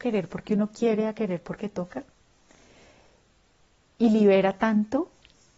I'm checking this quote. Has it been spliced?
no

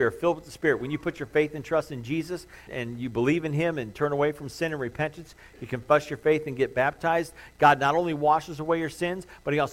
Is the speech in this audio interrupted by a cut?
yes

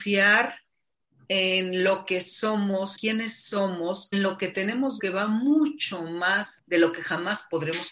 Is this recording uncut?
no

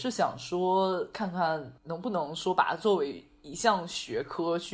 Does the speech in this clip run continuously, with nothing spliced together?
no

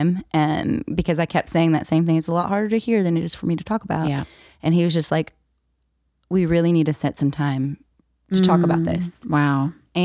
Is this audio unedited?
yes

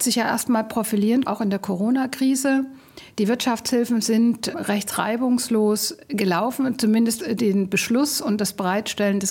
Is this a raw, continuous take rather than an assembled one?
no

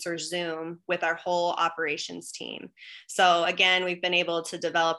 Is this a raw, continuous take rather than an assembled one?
yes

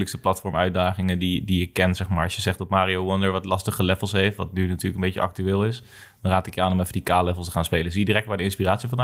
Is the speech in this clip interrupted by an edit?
no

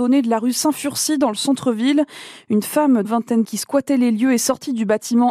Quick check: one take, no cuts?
no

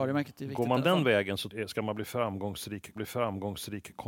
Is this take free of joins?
no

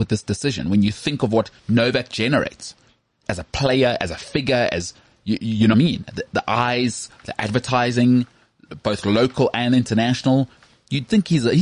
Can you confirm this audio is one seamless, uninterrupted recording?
no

